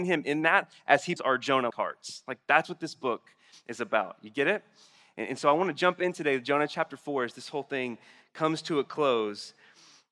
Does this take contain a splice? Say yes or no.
yes